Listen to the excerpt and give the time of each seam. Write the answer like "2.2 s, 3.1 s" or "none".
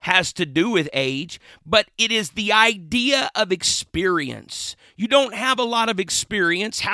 none